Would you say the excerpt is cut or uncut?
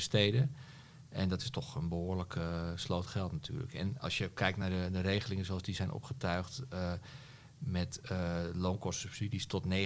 uncut